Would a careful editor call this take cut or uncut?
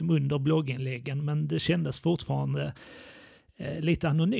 uncut